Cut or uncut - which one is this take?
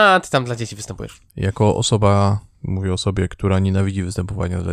cut